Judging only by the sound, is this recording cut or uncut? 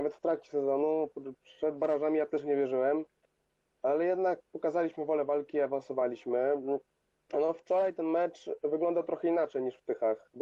uncut